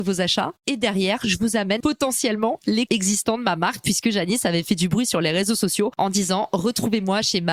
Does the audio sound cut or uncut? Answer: cut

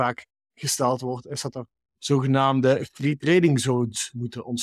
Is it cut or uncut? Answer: uncut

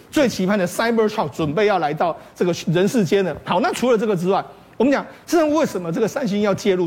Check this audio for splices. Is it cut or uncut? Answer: uncut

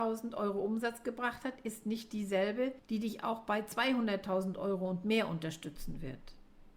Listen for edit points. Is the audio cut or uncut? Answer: uncut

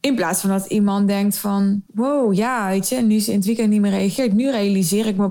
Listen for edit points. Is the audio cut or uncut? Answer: cut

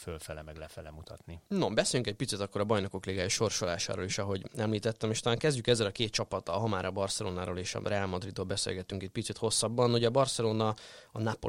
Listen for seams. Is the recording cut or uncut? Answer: cut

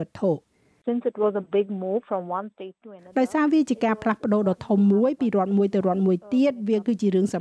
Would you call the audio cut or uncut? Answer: uncut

